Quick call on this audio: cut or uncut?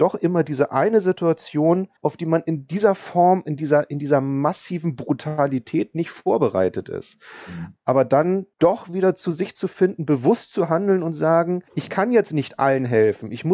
cut